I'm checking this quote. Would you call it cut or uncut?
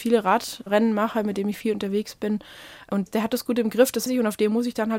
cut